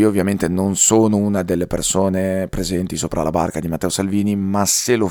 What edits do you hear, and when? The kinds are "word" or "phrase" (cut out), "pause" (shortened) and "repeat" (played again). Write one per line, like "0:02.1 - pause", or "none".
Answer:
none